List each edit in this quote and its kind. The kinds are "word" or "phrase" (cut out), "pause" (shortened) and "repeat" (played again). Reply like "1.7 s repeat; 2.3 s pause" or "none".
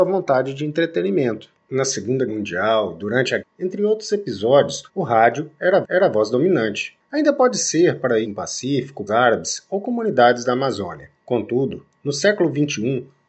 2.3 s word; 3.4 s phrase; 4.9 s pause; 5.8 s repeat; 8.2 s word; 9.1 s word; 11.2 s pause